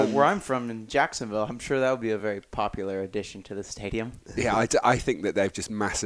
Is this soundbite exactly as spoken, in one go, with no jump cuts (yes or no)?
yes